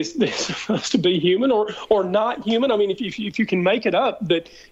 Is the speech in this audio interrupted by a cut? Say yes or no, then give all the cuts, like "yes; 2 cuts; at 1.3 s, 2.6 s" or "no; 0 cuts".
yes; 1 cut; at 2.9 s